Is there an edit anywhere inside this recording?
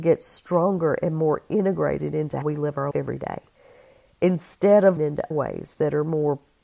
yes; 4 cuts; at 2.4 s, 2.9 s, 5.0 s, 5.3 s

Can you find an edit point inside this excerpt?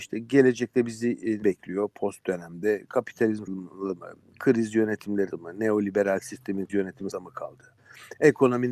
yes; 6 cuts; at 1.4 s, 2.2 s, 3.5 s, 5.3 s, 6.7 s, 7.1 s

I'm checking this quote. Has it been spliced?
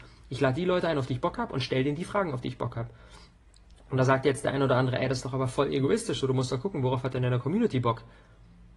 no; 0 cuts

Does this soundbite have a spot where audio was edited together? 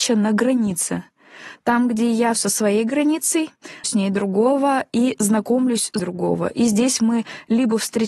yes; 3 cuts; at 2.3 s, 3.8 s, 6.0 s

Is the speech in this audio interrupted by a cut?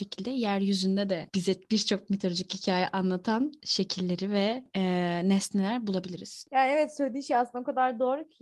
yes; 1 cut; at 3.6 s

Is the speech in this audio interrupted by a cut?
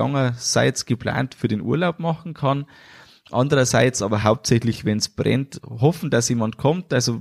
no; 0 cuts

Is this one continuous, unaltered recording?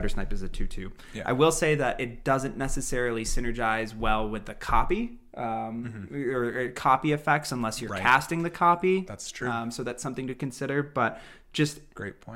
yes; 0 cuts

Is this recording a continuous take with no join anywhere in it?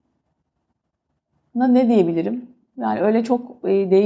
yes; 0 cuts

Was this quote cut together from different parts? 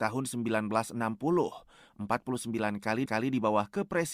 yes; 1 cut; at 3.1 s

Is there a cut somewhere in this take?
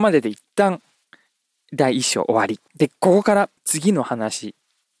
yes; 2 cuts; at 2.7 s, 3.6 s

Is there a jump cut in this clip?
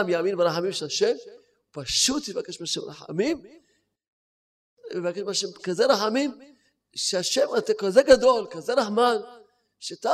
no; 0 cuts

